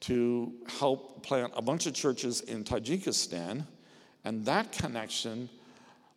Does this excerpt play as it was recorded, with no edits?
yes; 0 cuts

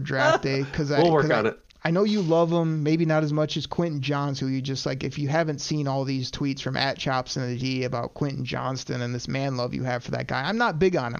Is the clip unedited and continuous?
yes; 0 cuts

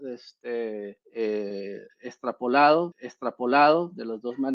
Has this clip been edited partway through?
yes; 2 cuts; at 1.0 s, 2.9 s

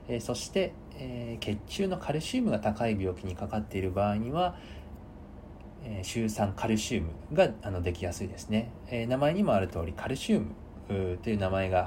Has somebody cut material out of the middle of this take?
no; 0 cuts

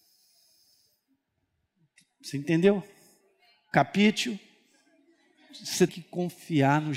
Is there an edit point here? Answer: yes; 1 cut; at 5.9 s

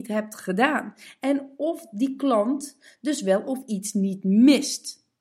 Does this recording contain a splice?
no; 0 cuts

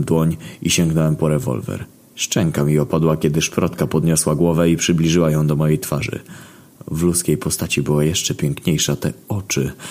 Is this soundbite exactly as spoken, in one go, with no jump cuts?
no; 1 cut; at 1.9 s

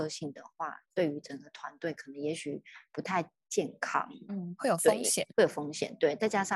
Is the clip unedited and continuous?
no; 1 cut; at 5.3 s

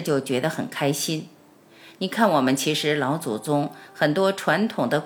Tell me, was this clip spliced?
no; 0 cuts

